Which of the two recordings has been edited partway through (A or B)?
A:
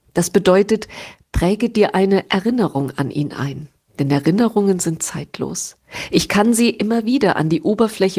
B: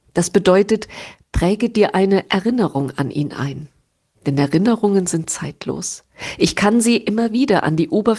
A